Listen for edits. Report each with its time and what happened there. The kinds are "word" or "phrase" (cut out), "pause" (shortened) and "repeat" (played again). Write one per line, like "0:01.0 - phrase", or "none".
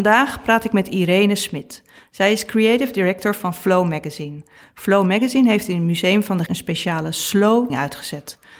0:06.5 - word
0:07.7 - word